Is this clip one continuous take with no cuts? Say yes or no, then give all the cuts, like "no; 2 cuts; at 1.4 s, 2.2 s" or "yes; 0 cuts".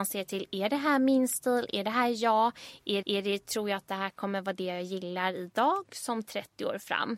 no; 1 cut; at 3.0 s